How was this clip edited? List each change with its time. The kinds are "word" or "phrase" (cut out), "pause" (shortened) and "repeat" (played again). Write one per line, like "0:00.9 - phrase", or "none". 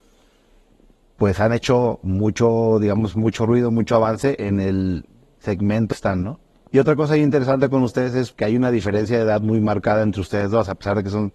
0:05.9 - phrase
0:06.5 - pause
0:08.3 - word

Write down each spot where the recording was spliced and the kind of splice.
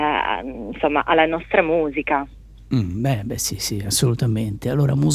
none

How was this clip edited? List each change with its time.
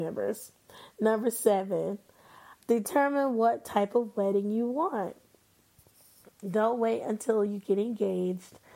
none

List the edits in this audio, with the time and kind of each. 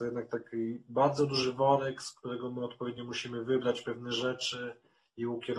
none

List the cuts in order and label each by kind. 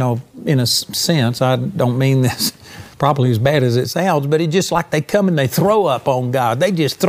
0:02.9 - pause

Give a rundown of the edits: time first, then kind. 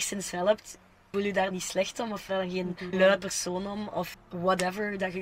0:01.1 - word
0:01.5 - word
0:02.3 - word
0:02.9 - word
0:04.1 - word

